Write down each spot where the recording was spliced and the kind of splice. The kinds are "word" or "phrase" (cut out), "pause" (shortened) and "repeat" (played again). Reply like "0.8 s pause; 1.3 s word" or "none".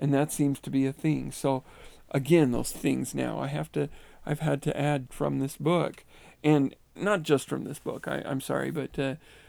2.7 s word; 5.1 s word; 7.0 s word